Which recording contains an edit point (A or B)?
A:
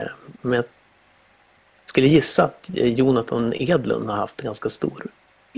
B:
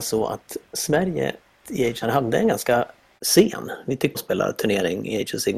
B